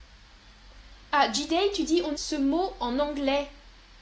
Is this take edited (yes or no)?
yes